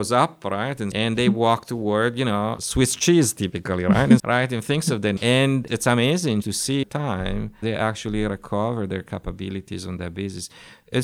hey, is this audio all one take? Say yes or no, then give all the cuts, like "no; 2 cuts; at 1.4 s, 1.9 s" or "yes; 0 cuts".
no; 8 cuts; at 0.9 s, 2.6 s, 4.2 s, 5.2 s, 5.7 s, 6.4 s, 6.8 s, 7.6 s